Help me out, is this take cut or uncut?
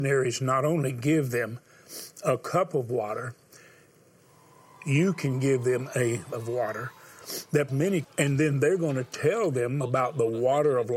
cut